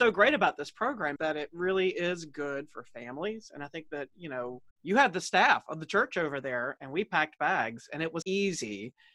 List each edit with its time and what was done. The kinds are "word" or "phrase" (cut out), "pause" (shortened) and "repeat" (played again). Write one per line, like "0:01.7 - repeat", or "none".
0:01.2 - word
0:04.7 - pause
0:08.2 - word